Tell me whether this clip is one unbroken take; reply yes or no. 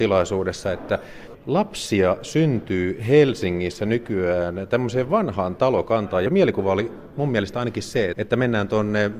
no